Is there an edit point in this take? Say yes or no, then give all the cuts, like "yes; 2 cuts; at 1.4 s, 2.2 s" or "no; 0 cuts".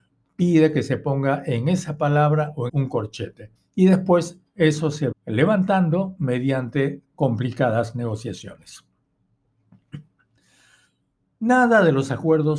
yes; 3 cuts; at 2.7 s, 3.6 s, 5.1 s